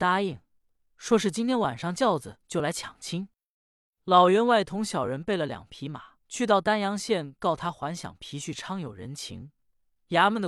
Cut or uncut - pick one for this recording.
cut